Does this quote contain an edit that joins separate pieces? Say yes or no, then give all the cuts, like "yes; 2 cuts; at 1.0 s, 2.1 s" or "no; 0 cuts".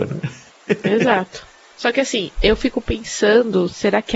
no; 0 cuts